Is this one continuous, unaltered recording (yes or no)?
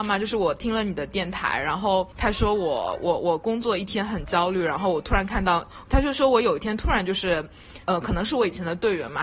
no